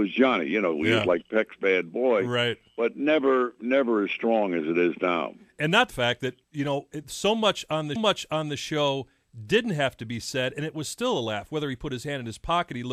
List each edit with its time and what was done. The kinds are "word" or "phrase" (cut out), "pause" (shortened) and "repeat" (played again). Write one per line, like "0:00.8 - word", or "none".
0:05.9 - phrase
0:06.4 - pause
0:08.0 - repeat